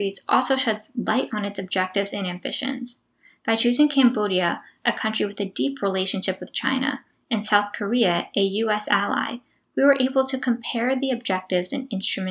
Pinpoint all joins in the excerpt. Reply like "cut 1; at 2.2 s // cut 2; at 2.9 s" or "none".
none

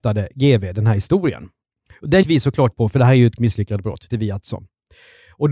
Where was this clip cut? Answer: cut 1; at 2.2 s // cut 2; at 2.7 s // cut 3; at 3.4 s // cut 4; at 4.1 s // cut 5; at 4.4 s

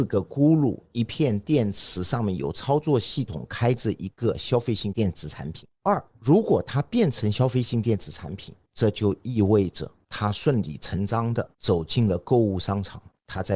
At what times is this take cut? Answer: cut 1; at 5.7 s

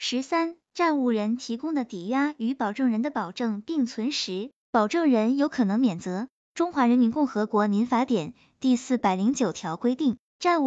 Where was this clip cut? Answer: none

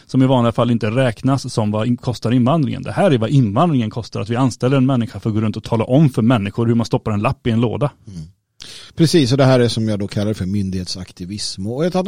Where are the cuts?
cut 1; at 8.9 s

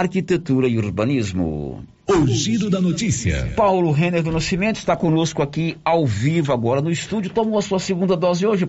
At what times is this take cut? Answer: none

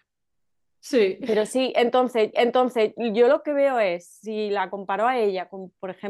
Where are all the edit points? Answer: cut 1; at 2.3 s

